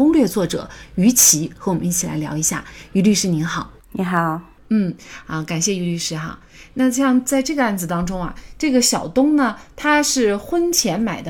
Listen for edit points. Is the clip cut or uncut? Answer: cut